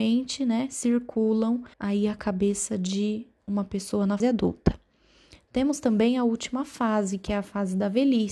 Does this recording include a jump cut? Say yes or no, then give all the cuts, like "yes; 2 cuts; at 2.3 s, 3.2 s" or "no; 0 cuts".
yes; 2 cuts; at 1.7 s, 4.2 s